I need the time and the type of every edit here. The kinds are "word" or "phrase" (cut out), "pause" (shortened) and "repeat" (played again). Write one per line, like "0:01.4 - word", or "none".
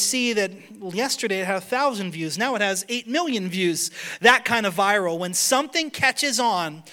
none